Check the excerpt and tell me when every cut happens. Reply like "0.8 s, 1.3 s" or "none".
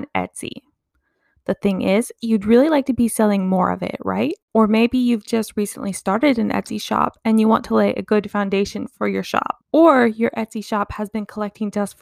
9.6 s